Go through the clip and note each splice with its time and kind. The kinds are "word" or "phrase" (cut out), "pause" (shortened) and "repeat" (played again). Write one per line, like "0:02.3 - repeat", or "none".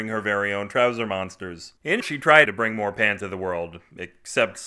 0:02.0 - word
0:02.5 - word
0:03.2 - word